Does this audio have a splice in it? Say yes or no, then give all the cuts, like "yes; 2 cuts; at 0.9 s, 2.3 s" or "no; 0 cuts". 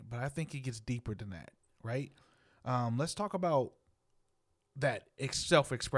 no; 0 cuts